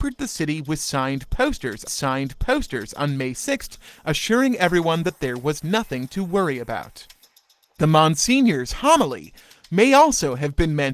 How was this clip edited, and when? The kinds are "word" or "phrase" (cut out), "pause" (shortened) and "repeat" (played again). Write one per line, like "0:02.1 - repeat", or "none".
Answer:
0:01.9 - repeat